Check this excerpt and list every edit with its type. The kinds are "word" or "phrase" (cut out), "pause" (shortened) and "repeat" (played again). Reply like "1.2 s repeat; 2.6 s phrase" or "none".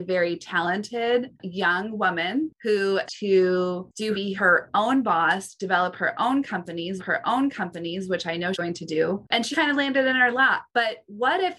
1.3 s word; 3.1 s word; 4.1 s phrase; 7.0 s repeat; 8.5 s word; 9.5 s word